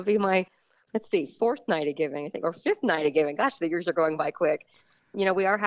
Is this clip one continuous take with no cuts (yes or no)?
yes